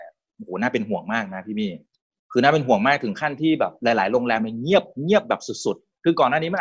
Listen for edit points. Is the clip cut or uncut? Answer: uncut